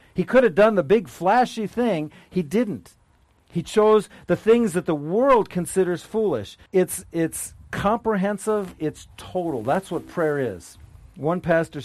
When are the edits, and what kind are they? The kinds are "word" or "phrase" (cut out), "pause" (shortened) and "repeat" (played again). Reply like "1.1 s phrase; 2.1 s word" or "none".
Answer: 6.7 s pause